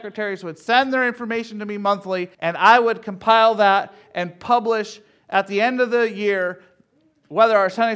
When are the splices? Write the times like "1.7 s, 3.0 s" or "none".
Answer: 2.3 s